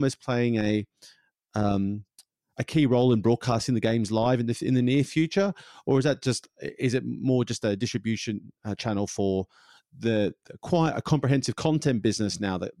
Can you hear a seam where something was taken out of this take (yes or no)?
no